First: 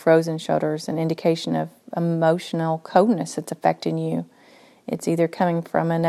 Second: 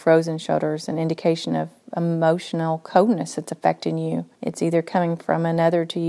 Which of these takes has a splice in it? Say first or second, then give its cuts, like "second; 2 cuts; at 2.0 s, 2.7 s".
second; 1 cut; at 4.3 s